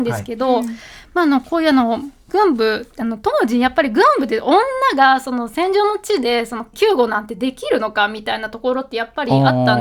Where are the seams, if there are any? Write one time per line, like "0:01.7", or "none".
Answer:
0:06.7